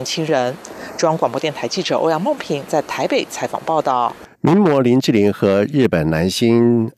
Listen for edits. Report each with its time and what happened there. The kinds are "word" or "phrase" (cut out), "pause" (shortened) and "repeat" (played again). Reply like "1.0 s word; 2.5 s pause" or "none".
4.3 s pause